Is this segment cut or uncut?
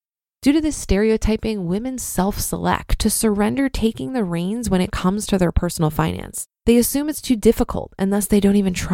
cut